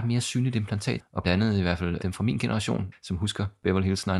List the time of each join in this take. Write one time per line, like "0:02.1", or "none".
0:01.2
0:02.0